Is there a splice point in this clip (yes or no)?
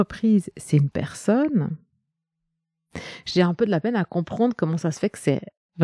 no